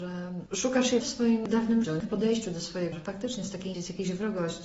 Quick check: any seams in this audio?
yes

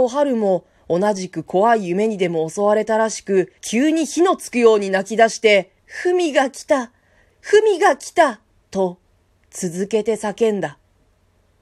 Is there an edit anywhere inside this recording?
yes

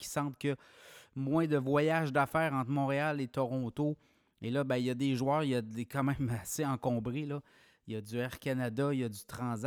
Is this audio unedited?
yes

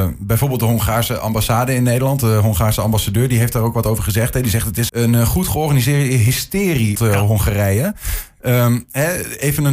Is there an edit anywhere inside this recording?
yes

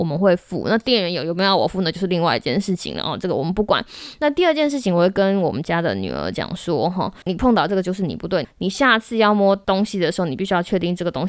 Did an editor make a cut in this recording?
no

